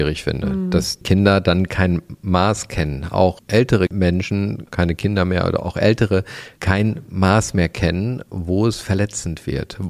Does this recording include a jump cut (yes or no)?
yes